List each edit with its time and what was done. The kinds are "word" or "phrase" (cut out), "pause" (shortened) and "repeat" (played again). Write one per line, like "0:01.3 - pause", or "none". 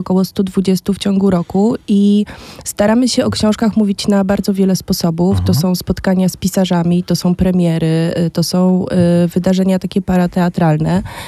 none

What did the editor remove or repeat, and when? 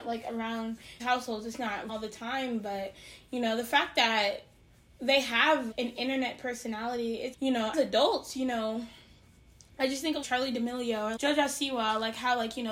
0:01.0 - word
0:01.9 - word
0:05.7 - word
0:07.3 - word
0:07.7 - word
0:10.2 - word
0:11.2 - word

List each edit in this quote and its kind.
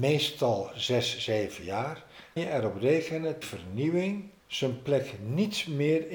0:02.4 - word
0:03.4 - phrase
0:04.4 - pause

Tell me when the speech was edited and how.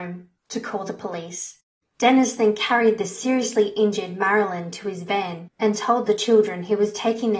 none

